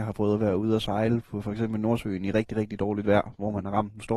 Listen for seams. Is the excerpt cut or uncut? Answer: uncut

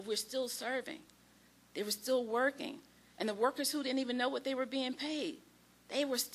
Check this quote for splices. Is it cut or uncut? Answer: uncut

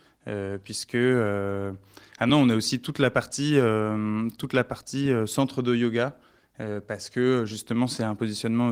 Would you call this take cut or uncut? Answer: uncut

